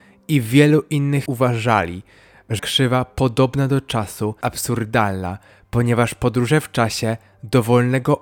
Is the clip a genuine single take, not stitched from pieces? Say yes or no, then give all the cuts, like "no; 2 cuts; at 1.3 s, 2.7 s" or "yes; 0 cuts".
no; 3 cuts; at 1.3 s, 2.6 s, 4.4 s